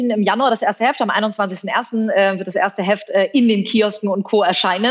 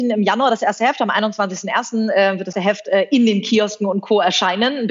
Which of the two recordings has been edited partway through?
second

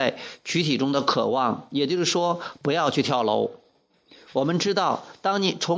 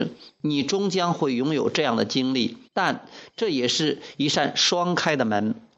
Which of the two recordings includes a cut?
second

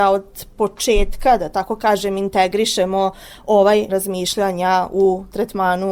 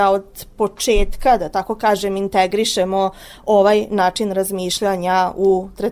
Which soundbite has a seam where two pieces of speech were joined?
first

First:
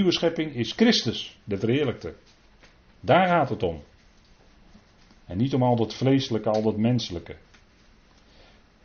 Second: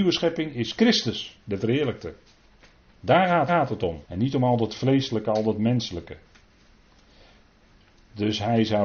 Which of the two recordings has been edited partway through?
second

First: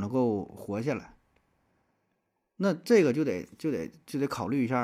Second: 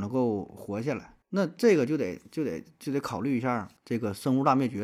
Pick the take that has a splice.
second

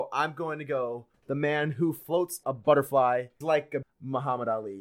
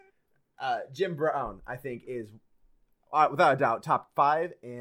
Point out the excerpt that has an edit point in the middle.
first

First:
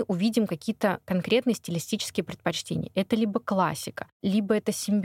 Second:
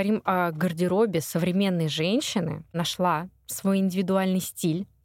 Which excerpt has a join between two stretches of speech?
second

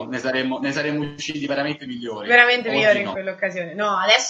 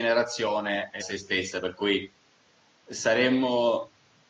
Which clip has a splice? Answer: second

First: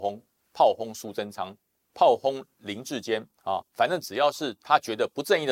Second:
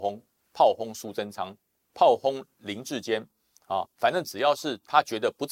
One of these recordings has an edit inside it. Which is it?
first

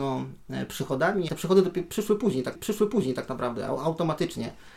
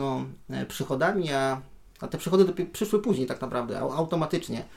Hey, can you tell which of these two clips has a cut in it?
first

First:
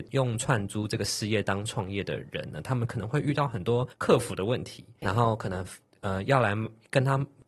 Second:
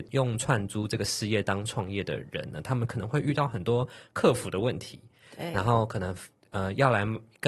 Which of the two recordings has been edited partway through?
first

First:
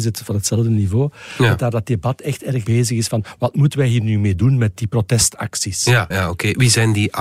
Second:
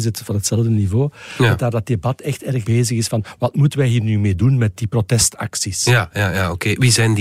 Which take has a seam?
first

